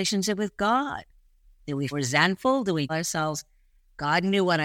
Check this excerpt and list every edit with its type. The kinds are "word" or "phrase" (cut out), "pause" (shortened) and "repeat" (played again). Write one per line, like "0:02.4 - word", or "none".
0:01.9 - word
0:02.9 - word